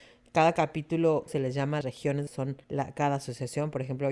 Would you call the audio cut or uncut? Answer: cut